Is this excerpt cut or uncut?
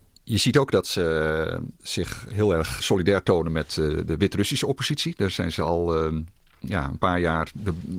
uncut